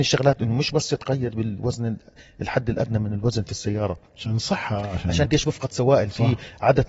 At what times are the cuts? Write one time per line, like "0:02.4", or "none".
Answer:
0:05.3